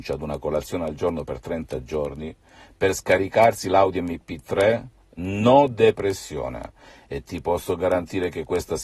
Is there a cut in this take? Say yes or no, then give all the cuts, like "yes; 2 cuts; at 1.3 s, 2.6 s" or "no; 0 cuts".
no; 0 cuts